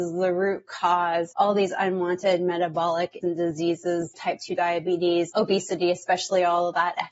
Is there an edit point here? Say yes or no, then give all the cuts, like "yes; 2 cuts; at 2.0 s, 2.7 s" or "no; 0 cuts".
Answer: yes; 4 cuts; at 1.3 s, 3.2 s, 4.1 s, 5.3 s